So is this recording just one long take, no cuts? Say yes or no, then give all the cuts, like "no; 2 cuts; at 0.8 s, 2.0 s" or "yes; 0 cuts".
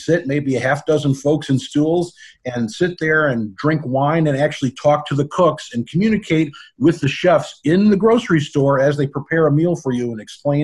yes; 0 cuts